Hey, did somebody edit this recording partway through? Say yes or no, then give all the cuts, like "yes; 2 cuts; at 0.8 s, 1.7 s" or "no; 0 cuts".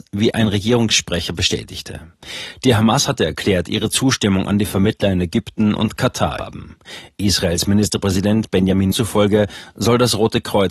yes; 2 cuts; at 6.4 s, 8.9 s